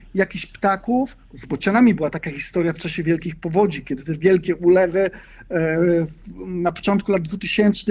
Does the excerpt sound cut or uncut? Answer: cut